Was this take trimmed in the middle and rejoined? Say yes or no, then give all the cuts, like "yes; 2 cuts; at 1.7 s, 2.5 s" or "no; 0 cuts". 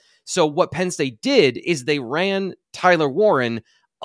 yes; 1 cut; at 2.6 s